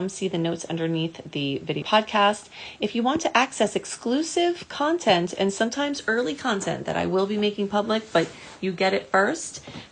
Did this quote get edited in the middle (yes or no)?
yes